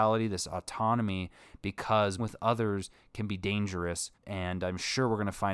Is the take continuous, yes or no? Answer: no